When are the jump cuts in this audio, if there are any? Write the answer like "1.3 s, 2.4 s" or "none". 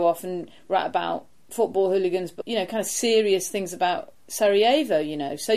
2.4 s